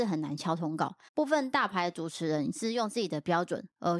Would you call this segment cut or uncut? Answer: cut